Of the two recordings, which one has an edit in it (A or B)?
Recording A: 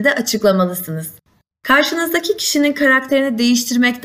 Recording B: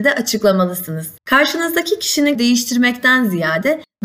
B